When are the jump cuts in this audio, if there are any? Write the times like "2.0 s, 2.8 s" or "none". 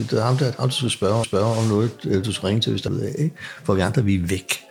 1.2 s, 2.9 s